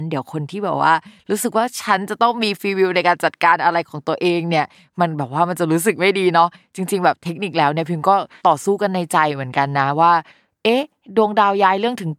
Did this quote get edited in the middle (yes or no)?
no